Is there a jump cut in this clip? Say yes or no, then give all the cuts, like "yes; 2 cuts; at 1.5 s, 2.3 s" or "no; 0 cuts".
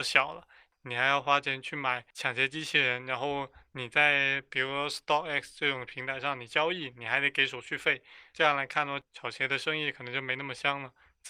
no; 0 cuts